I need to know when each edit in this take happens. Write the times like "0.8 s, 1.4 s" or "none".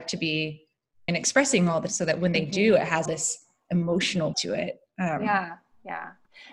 1.1 s, 1.9 s, 3.1 s, 4.3 s